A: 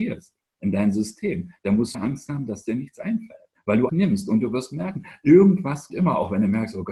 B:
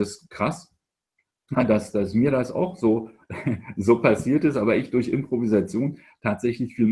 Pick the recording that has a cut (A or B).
A